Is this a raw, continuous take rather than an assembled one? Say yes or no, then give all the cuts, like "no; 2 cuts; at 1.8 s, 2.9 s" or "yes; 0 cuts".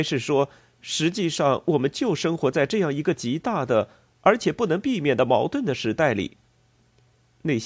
yes; 0 cuts